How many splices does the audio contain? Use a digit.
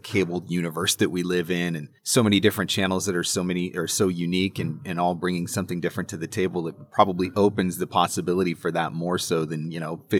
1